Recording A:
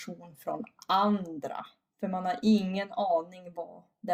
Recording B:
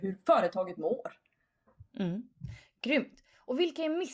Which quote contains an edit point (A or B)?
B